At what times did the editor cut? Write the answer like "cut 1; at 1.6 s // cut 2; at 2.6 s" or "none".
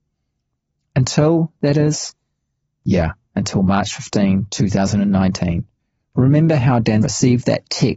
cut 1; at 7.0 s